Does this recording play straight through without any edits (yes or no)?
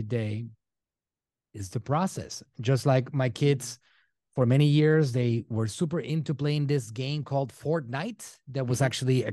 yes